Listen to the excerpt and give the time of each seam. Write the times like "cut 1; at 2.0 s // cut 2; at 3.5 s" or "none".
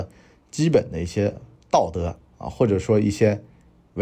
cut 1; at 1.6 s // cut 2; at 2.3 s